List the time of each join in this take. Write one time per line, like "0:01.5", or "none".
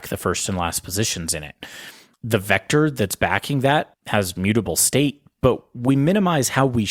none